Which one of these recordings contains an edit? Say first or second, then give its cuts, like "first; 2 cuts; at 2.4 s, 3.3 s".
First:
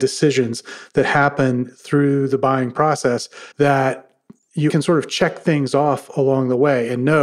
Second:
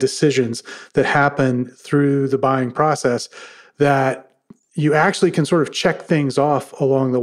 first; 2 cuts; at 3.5 s, 4.7 s